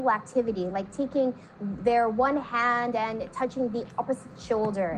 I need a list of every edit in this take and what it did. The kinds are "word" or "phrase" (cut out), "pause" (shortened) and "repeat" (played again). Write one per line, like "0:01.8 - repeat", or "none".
none

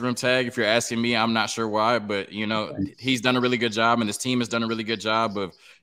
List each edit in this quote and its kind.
none

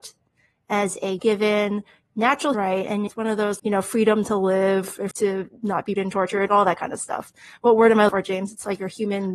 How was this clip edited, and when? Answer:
0:01.2 - word
0:02.5 - word
0:03.1 - word
0:03.6 - word
0:05.1 - word
0:06.0 - word
0:06.5 - word
0:08.1 - word

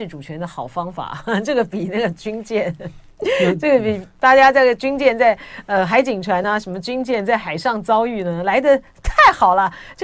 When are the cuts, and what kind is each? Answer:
none

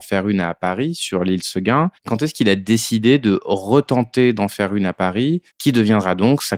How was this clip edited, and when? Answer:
0:02.0 - pause
0:05.5 - pause

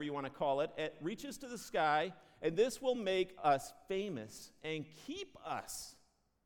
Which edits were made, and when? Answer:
none

